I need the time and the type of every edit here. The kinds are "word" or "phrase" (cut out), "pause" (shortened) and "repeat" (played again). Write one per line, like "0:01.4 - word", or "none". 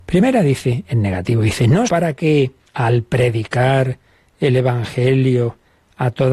0:01.9 - word
0:02.7 - pause